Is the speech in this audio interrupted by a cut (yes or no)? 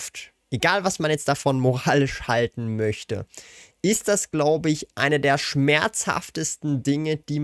no